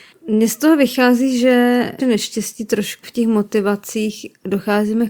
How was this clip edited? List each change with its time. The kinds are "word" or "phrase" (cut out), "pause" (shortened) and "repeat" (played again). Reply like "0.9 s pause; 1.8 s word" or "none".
2.0 s phrase; 3.0 s phrase